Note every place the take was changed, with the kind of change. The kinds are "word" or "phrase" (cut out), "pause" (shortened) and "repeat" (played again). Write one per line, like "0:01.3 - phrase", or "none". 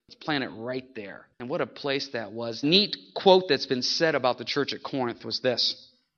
0:01.3 - pause
0:02.6 - phrase